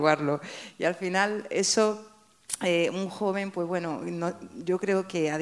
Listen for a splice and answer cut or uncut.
uncut